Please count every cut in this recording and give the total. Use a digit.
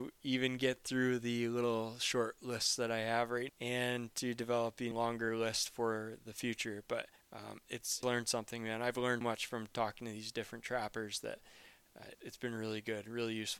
6